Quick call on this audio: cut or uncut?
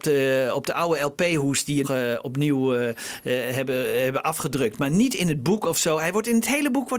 cut